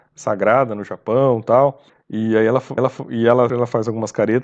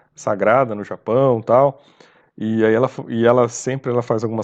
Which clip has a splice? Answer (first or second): first